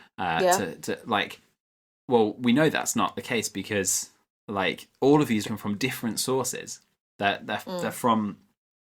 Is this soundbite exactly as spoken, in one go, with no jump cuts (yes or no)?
no